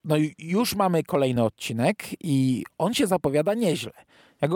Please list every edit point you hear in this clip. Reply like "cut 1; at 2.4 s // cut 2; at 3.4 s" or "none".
none